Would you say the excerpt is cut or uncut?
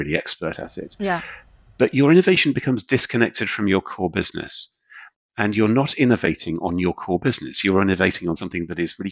uncut